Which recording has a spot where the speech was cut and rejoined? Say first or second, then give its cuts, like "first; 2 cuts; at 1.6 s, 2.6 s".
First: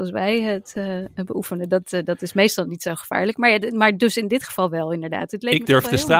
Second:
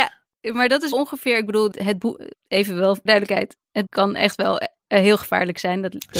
second; 5 cuts; at 0.9 s, 1.7 s, 2.3 s, 3.1 s, 3.9 s